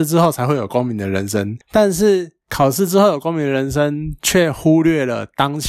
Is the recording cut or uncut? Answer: uncut